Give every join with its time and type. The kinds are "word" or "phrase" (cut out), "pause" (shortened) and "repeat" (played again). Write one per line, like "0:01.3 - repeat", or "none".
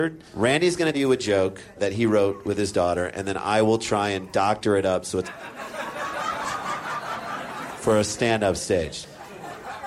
0:00.9 - word
0:01.8 - word
0:05.2 - word